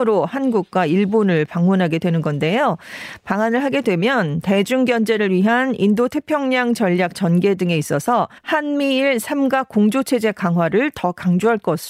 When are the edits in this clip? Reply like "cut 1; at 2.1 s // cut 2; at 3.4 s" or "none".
cut 1; at 8.4 s